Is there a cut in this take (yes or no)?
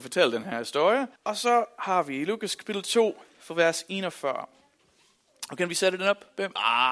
yes